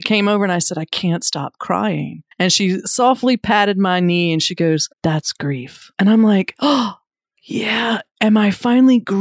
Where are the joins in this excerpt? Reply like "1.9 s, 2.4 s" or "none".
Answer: 2.3 s, 4.9 s, 5.9 s, 7.1 s